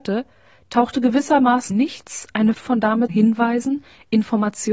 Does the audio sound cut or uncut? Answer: cut